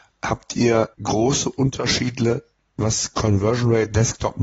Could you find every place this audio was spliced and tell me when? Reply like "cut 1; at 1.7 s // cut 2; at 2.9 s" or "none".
cut 1; at 0.9 s